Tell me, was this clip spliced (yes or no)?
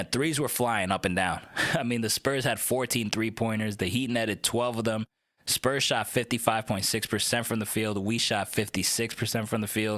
no